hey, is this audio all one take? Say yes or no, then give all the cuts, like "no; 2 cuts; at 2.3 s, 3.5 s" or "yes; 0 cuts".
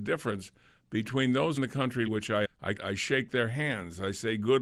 no; 4 cuts; at 1.6 s, 2.1 s, 2.4 s, 2.8 s